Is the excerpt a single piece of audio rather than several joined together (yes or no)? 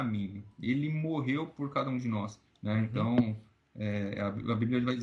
yes